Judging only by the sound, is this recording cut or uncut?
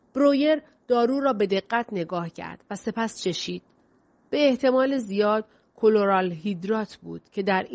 uncut